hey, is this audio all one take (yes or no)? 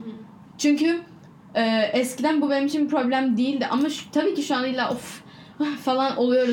yes